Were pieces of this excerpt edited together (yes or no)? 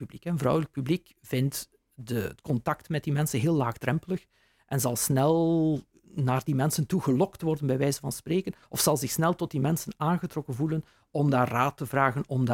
no